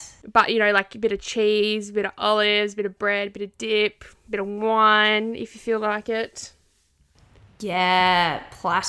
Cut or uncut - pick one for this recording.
uncut